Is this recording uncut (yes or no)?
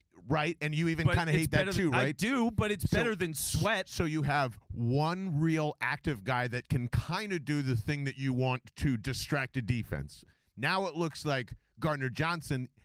yes